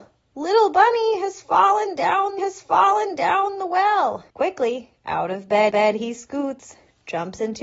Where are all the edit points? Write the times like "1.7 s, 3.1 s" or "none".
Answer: 2.4 s, 4.3 s, 5.7 s